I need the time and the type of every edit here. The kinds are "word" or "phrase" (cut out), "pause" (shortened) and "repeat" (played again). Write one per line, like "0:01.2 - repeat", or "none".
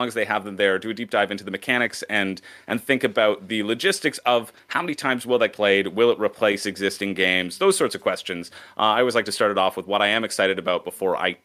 0:05.5 - phrase